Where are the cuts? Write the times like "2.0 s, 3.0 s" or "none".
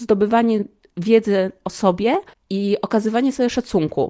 2.3 s